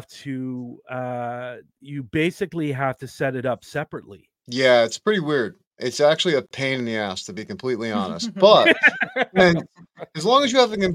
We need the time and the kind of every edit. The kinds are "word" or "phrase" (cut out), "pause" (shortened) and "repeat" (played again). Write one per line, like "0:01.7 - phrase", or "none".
0:04.4 - pause

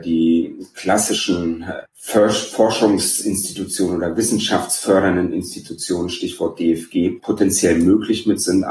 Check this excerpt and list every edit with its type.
none

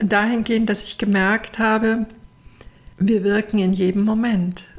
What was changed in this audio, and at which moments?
0:02.9 - pause

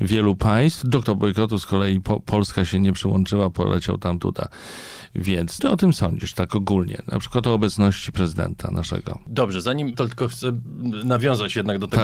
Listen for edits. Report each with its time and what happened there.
0:01.0 - word
0:04.2 - word
0:05.6 - word
0:09.9 - word

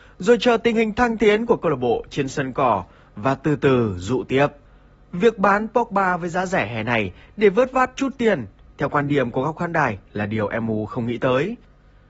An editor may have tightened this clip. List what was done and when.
none

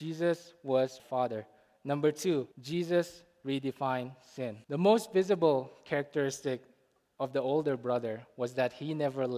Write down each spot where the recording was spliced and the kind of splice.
0:01.0 - phrase
0:02.5 - pause
0:04.6 - pause

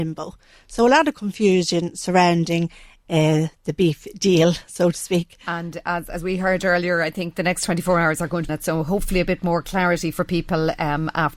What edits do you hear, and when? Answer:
0:08.5 - phrase

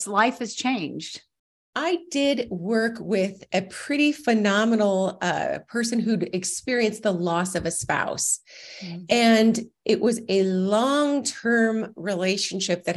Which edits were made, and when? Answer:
none

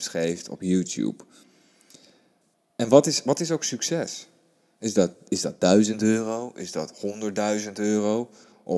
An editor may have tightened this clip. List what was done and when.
none

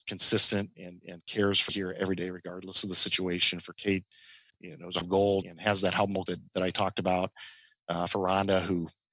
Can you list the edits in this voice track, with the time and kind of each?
0:01.7 - word
0:05.0 - word
0:05.4 - word
0:06.3 - word

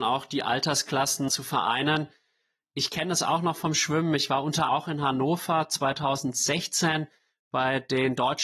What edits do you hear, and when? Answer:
0:01.3 - word
0:04.7 - word

